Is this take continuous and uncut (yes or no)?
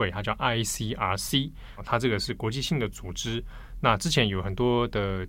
no